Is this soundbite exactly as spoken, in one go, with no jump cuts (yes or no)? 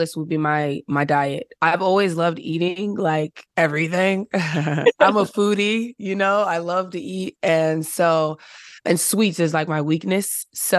no